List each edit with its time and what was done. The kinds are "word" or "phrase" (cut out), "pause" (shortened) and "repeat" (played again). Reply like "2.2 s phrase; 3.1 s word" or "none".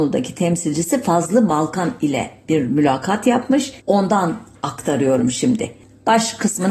3.8 s pause